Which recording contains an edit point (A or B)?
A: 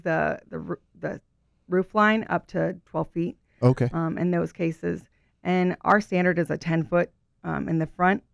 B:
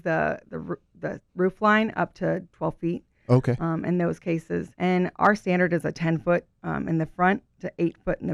B